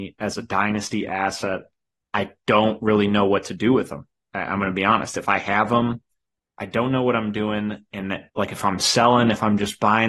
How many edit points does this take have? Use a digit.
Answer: 1